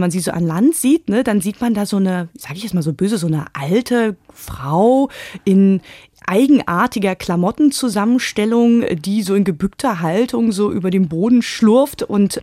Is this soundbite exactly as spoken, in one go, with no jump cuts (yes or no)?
yes